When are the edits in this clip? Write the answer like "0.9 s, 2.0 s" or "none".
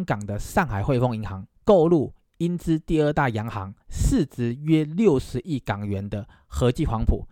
1.6 s, 3.8 s